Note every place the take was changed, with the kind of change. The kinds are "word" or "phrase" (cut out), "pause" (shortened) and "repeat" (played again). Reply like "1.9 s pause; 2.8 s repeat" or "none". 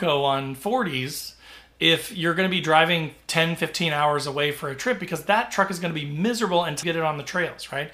6.8 s word